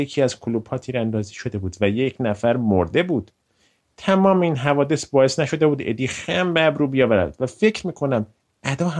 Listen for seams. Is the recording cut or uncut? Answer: uncut